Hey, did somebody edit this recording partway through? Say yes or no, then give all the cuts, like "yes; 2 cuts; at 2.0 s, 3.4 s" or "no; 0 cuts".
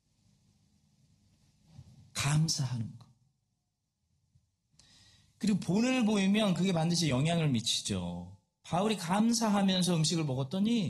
no; 0 cuts